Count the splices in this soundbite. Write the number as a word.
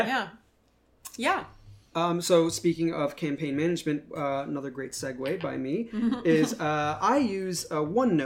zero